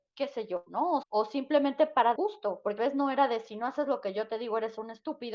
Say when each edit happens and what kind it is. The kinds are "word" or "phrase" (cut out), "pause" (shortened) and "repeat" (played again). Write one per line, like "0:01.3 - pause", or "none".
0:01.0 - word
0:02.2 - word
0:02.8 - word